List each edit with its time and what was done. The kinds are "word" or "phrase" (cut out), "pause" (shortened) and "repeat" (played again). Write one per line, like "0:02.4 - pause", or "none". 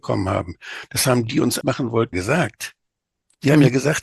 0:01.3 - word
0:01.6 - word
0:02.1 - word